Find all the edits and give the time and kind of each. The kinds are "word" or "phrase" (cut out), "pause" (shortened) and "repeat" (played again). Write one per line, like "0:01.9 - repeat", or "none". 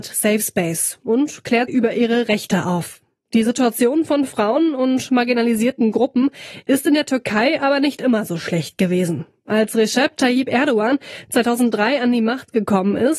0:01.7 - word